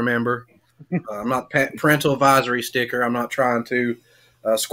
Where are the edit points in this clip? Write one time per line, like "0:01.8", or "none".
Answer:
0:01.0